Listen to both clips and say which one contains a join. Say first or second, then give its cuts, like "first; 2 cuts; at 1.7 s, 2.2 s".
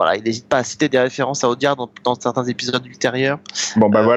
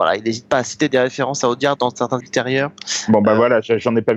second; 2 cuts; at 1.8 s, 2.2 s